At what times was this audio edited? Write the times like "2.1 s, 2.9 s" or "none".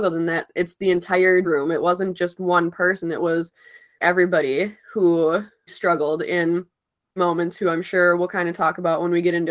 1.4 s, 4.0 s, 5.7 s, 7.2 s